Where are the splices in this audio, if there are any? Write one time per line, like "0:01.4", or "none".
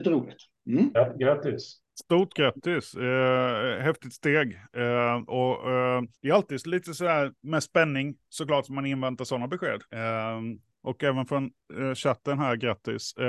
0:06.1
0:07.4
0:09.9